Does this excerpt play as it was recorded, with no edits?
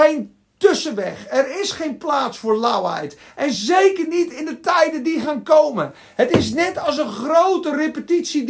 yes; 0 cuts

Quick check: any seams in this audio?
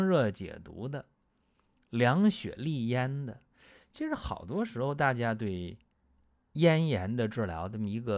no; 0 cuts

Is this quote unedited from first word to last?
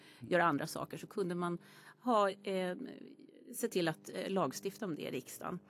yes; 0 cuts

